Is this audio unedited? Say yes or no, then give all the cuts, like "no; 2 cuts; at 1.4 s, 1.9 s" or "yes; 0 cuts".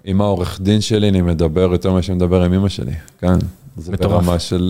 yes; 0 cuts